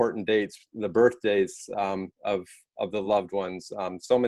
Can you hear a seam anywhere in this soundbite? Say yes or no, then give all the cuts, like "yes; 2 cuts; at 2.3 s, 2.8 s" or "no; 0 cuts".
no; 0 cuts